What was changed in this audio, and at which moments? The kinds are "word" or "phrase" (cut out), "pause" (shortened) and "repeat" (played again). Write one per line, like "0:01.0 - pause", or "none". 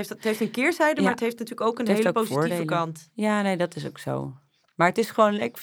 none